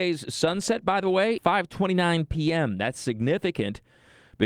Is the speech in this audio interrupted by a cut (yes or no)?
yes